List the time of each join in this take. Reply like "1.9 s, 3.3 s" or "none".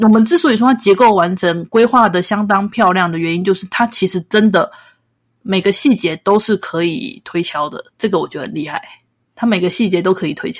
none